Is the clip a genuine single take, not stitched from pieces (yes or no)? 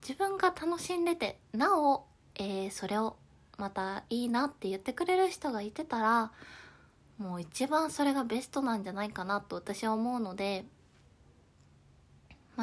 yes